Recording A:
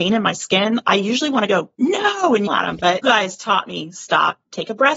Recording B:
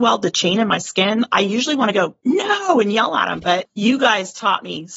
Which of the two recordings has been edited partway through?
A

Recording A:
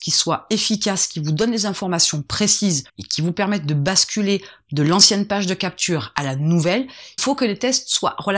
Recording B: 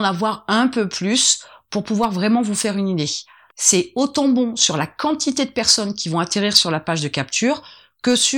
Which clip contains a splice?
A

